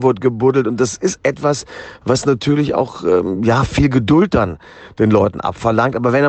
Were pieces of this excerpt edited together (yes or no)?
no